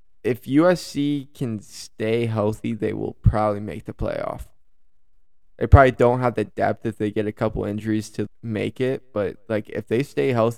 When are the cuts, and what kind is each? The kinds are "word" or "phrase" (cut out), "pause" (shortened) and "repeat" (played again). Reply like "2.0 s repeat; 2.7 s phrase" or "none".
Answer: 8.3 s word